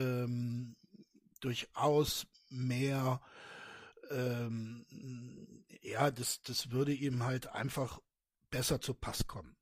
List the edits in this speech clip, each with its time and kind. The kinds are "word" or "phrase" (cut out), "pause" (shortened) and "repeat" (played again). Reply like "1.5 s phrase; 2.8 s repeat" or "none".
none